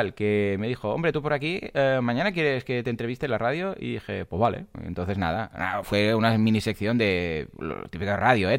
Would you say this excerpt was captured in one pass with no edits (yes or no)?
yes